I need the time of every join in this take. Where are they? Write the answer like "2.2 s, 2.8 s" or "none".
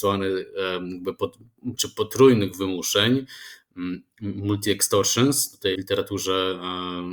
1.8 s, 5.7 s